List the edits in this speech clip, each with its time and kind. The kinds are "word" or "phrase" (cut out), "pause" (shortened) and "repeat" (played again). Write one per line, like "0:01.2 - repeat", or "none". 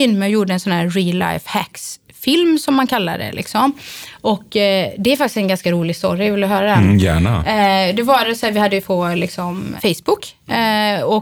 0:08.8 - phrase
0:09.8 - word